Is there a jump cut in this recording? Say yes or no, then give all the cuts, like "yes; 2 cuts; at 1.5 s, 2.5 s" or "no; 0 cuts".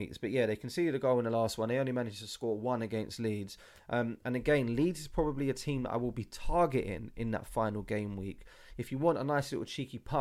no; 0 cuts